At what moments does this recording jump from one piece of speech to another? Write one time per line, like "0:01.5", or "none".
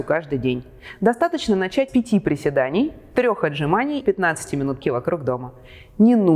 0:01.9
0:04.0
0:04.8